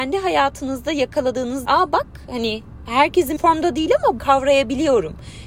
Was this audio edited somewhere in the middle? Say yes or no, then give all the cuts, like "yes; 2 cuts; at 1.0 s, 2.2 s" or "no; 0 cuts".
yes; 3 cuts; at 1.6 s, 3.4 s, 4.2 s